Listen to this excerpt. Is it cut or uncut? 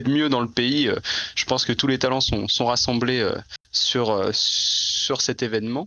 cut